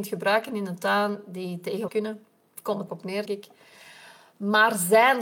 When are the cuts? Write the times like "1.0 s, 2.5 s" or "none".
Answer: 1.9 s, 2.9 s, 3.3 s